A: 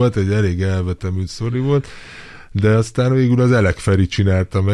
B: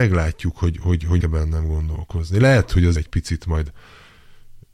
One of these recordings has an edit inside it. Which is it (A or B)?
B